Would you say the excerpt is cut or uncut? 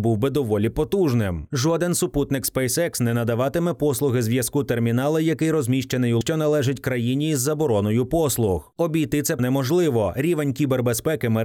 cut